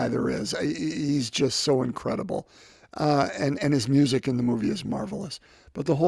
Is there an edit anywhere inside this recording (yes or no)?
no